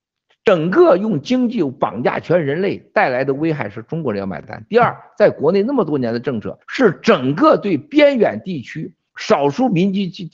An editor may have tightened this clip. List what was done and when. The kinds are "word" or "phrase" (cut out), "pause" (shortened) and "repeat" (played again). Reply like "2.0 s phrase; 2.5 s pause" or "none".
6.6 s pause

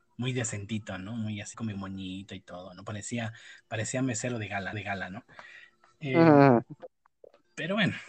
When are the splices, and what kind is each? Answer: 1.5 s word; 4.7 s repeat

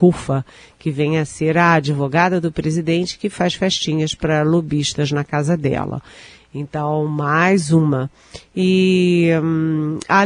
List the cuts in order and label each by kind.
none

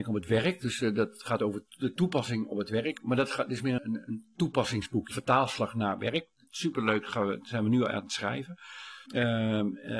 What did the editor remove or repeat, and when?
3.8 s word; 5.1 s word; 9.1 s pause

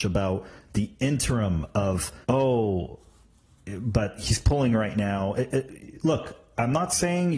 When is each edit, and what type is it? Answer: 2.2 s pause

